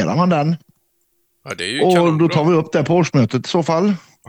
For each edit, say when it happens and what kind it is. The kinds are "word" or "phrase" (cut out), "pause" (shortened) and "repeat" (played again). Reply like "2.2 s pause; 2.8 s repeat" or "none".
none

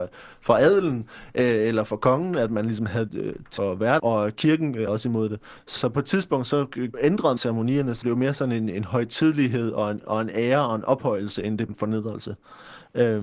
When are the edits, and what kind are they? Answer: 3.1 s word; 3.6 s word; 4.0 s word; 4.9 s word; 5.8 s word; 6.9 s word; 7.4 s word; 8.0 s word; 11.7 s word

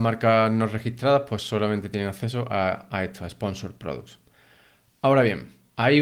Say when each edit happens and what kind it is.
none

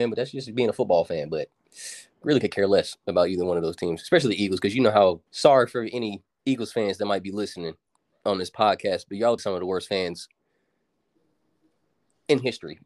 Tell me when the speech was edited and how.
5.3 s pause; 9.4 s word

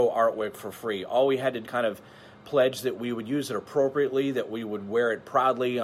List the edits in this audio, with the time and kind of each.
1.6 s phrase

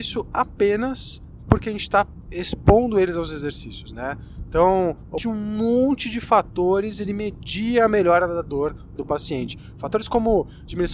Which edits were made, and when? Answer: 5.2 s phrase; 9.0 s word

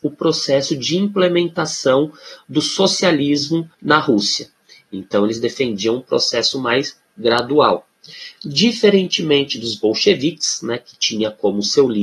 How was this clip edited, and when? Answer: 3.7 s pause

